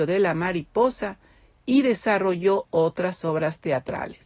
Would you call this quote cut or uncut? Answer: uncut